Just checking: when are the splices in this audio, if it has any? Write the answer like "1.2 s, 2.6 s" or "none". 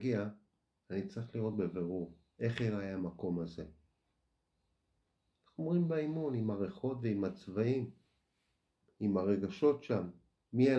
none

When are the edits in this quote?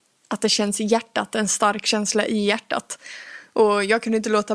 none

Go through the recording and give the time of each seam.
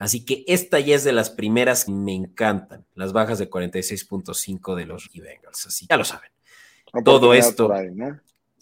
1.9 s, 2.9 s, 5.1 s, 5.9 s

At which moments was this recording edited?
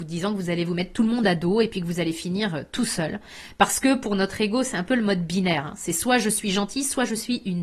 none

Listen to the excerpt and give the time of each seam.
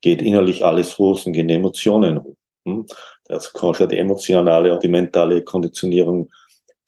3.8 s, 4.8 s

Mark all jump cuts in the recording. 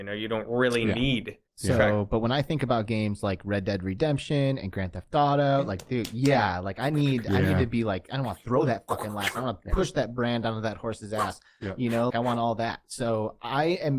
1.5 s, 12.1 s

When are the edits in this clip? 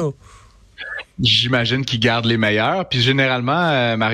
1.1 s

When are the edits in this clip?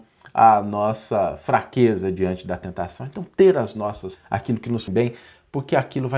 4.2 s, 4.9 s

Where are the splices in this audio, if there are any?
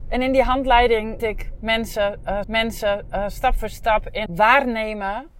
1.2 s, 2.4 s, 4.3 s

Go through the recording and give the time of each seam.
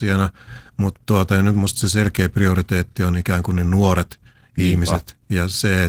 none

